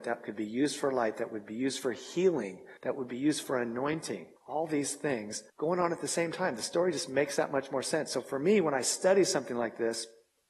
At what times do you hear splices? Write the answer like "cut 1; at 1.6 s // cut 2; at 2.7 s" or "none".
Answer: cut 1; at 2.8 s // cut 2; at 4.4 s // cut 3; at 5.5 s